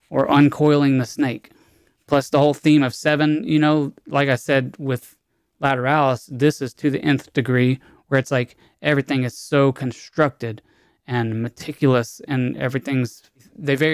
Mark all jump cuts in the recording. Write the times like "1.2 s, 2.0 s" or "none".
none

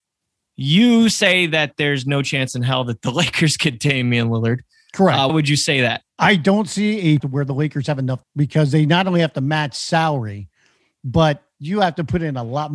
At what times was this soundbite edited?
5.3 s, 6.1 s, 7.2 s, 8.2 s

